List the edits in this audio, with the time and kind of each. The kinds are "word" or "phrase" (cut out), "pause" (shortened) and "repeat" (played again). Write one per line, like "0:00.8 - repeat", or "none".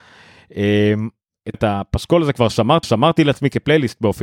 0:01.5 - word
0:02.8 - repeat